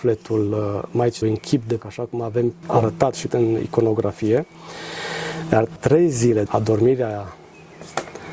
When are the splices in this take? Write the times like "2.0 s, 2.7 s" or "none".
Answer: 1.2 s, 1.8 s, 2.6 s, 3.3 s, 5.8 s, 6.5 s